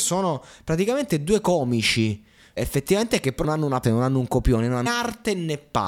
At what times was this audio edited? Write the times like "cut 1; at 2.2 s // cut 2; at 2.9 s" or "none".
cut 1; at 2.6 s // cut 2; at 3.4 s // cut 3; at 3.8 s // cut 4; at 4.9 s